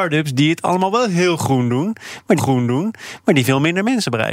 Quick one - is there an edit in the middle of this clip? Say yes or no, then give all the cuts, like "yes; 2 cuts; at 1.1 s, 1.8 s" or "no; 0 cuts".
yes; 1 cut; at 2.4 s